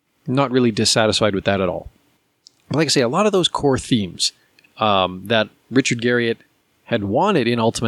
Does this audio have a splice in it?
no; 0 cuts

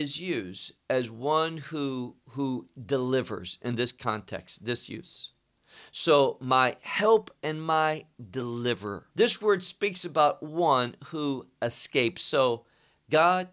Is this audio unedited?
no; 1 cut; at 9.1 s

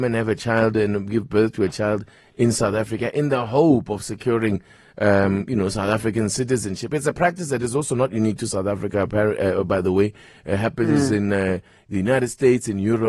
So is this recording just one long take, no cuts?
yes; 0 cuts

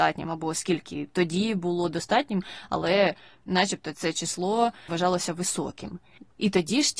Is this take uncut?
yes; 0 cuts

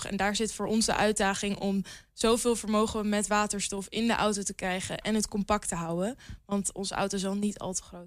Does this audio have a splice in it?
no; 0 cuts

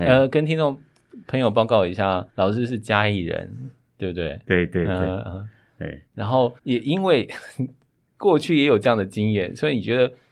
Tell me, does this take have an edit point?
yes; 3 cuts; at 2.3 s, 6.1 s, 6.6 s

